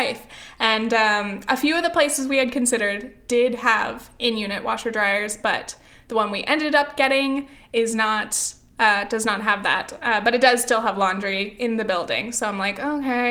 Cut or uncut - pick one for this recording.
uncut